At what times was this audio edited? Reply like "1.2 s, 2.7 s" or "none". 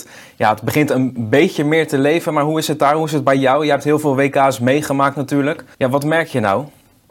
5.7 s